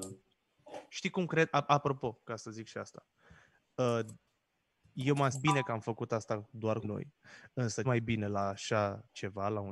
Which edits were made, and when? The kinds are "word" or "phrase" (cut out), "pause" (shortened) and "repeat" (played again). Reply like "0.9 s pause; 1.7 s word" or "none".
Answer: 5.3 s word; 6.8 s word; 7.8 s word